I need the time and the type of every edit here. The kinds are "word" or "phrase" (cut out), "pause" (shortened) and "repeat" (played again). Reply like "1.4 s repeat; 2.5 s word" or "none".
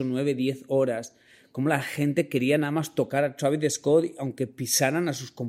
none